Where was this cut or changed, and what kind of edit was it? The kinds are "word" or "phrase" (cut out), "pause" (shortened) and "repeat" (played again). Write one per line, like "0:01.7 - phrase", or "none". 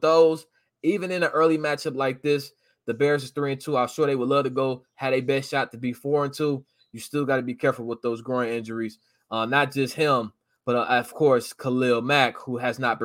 none